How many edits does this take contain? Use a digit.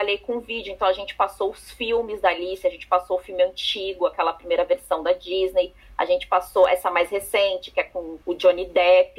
1